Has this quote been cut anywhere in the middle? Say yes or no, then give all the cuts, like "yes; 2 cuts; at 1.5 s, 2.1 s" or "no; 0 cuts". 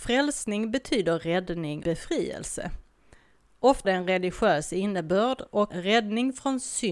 yes; 3 cuts; at 1.8 s, 3.8 s, 5.7 s